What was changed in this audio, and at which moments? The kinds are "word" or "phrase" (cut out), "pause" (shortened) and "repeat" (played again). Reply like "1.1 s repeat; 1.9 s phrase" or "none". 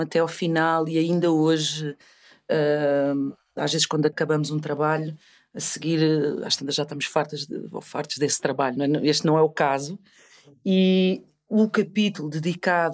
none

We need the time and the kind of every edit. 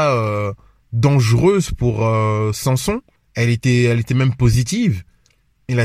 3.2 s pause

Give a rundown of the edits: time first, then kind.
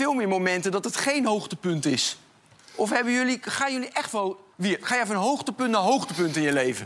4.5 s pause

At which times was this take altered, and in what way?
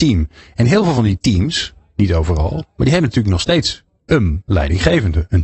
none

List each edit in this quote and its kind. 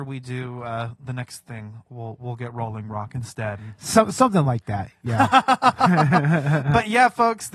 none

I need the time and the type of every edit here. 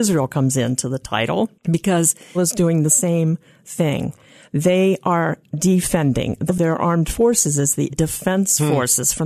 2.3 s word; 6.5 s word; 7.9 s word

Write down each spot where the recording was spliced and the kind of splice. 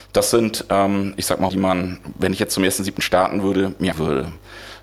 1.5 s word; 3.9 s word

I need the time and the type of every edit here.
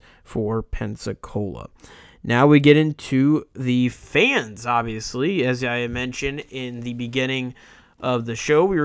none

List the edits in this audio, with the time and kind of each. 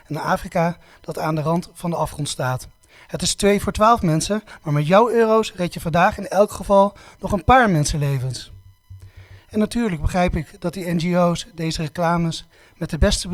none

